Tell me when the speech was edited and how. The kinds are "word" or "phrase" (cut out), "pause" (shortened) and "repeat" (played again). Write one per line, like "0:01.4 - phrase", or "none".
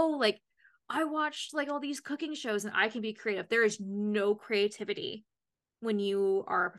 none